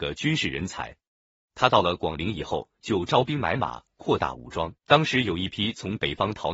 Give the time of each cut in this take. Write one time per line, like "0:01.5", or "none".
0:04.8